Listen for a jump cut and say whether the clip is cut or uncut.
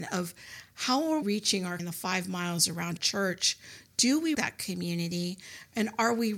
cut